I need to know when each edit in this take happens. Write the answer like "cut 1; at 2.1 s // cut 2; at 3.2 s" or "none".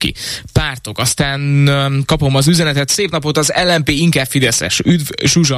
none